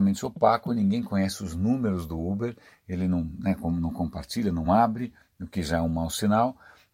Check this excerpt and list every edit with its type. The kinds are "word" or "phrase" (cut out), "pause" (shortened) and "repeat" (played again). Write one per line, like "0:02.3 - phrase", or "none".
none